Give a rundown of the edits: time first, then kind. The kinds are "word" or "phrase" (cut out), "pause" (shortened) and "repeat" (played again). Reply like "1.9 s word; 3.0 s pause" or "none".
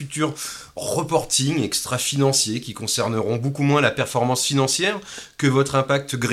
none